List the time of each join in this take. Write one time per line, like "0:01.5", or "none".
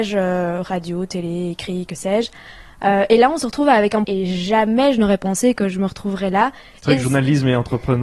0:04.0